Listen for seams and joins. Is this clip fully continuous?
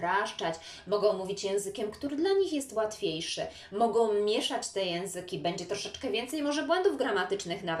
yes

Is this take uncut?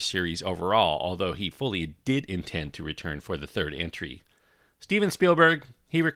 yes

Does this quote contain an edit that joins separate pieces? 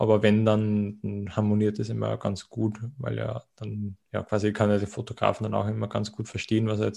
yes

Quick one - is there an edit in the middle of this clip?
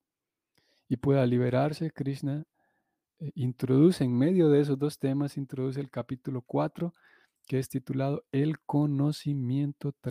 no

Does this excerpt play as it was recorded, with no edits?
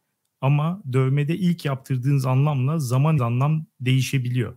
no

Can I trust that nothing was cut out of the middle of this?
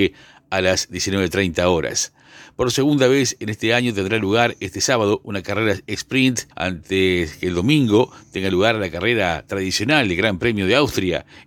no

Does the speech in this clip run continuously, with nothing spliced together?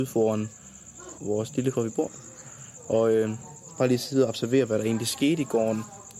no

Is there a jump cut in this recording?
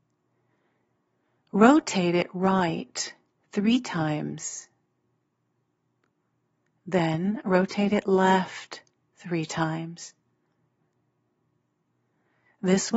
no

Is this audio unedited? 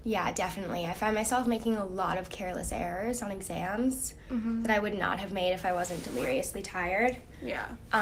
yes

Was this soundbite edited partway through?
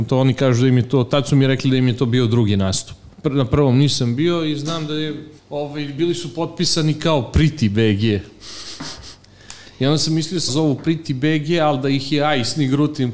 yes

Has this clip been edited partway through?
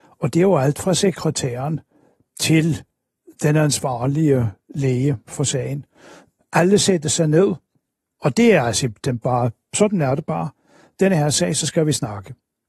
no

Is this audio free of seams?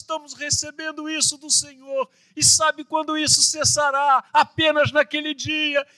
no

